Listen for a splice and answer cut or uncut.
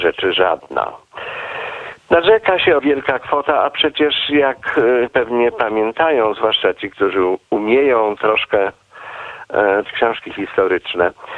cut